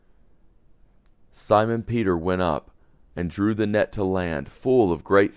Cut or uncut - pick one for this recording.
uncut